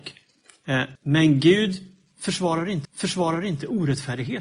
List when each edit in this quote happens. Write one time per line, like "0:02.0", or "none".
0:01.0
0:02.8